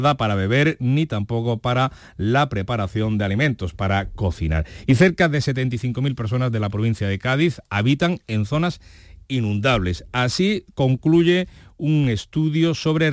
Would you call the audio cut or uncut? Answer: uncut